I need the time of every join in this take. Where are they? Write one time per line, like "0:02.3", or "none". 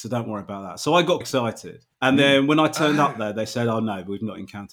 0:01.2
0:01.9